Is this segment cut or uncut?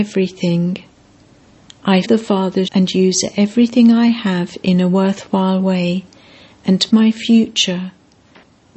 cut